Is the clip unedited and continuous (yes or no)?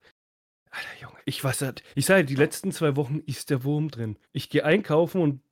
no